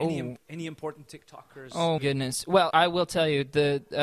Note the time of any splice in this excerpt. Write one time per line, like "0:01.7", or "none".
0:01.1
0:02.0
0:02.7